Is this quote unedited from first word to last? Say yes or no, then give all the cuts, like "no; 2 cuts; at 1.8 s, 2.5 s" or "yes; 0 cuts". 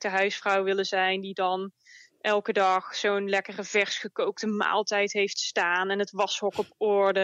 yes; 0 cuts